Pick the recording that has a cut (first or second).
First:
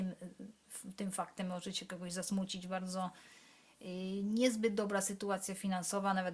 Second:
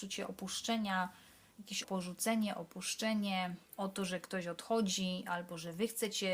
second